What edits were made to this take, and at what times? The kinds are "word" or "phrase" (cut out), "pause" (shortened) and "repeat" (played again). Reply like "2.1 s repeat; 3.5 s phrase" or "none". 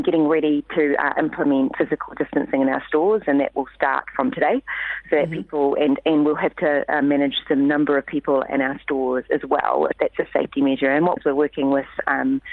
1.7 s word; 9.9 s word; 11.2 s phrase